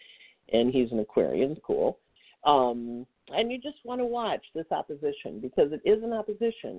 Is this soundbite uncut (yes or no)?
no